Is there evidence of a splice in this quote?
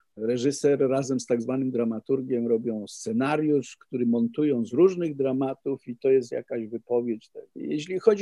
no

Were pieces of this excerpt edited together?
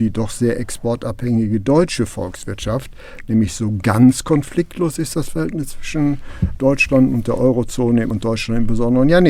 yes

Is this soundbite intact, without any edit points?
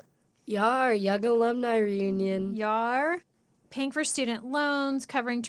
yes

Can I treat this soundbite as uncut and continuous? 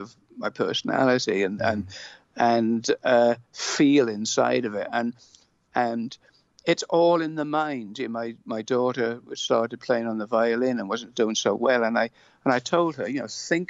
yes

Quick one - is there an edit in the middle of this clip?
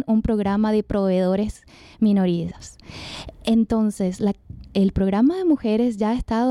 no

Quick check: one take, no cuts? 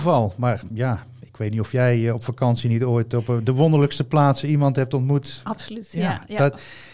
yes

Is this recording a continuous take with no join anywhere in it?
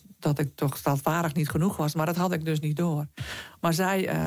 yes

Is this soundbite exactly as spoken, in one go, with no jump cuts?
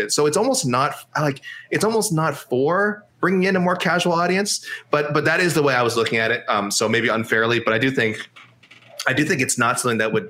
yes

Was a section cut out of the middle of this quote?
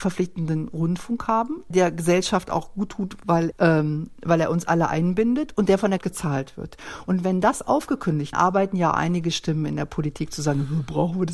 yes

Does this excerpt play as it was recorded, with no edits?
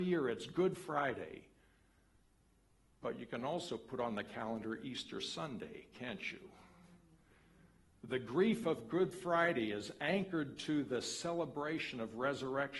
yes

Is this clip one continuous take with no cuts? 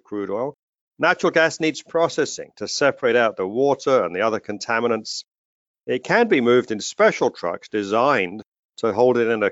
yes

